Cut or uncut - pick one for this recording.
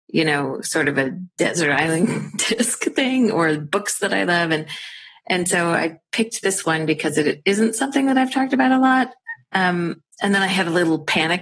uncut